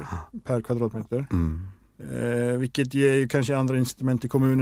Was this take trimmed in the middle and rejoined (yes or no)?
no